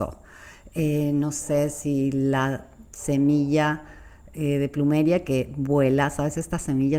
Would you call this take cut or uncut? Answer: uncut